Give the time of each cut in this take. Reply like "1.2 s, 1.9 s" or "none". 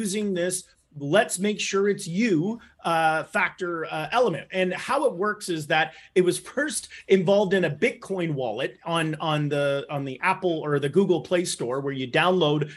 none